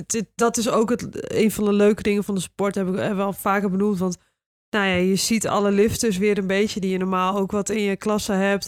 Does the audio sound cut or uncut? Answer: uncut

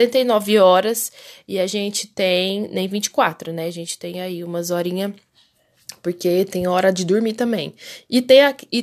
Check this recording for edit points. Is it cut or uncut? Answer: uncut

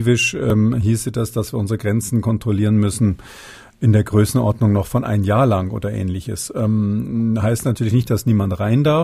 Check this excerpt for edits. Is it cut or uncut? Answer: uncut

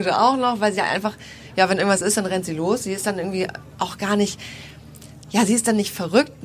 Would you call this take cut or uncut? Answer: uncut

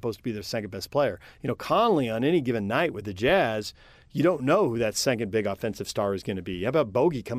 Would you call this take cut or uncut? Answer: uncut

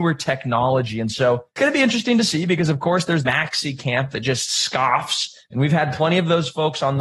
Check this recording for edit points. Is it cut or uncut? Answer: cut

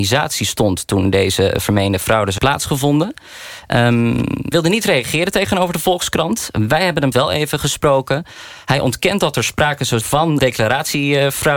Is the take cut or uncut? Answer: cut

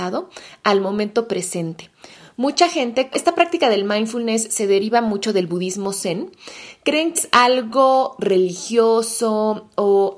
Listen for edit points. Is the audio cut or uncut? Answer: cut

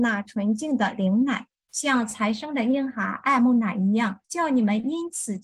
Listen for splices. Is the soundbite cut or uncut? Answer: cut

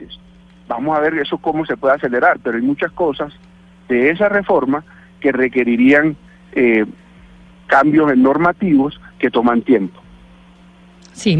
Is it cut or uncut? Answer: uncut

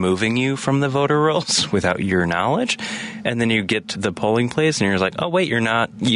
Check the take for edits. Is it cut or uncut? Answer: cut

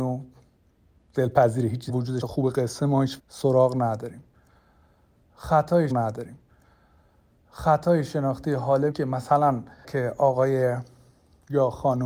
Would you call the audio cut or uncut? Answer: cut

